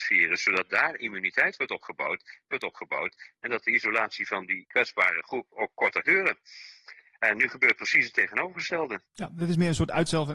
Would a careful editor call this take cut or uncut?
cut